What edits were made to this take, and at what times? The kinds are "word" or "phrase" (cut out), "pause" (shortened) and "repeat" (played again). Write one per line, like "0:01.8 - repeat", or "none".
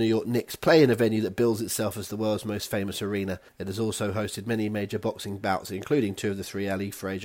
0:03.5 - pause